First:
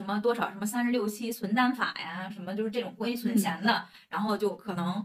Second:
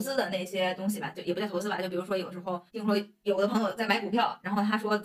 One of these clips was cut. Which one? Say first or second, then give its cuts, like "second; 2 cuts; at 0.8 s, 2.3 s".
second; 1 cut; at 2.7 s